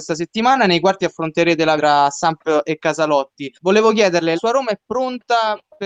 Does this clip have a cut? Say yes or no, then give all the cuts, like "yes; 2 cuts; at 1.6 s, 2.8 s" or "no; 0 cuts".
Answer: yes; 3 cuts; at 1.8 s, 3.6 s, 4.3 s